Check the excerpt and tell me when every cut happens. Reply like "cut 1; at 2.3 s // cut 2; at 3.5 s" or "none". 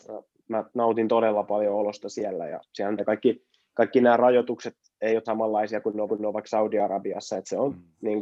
cut 1; at 3.0 s // cut 2; at 5.2 s // cut 3; at 6.1 s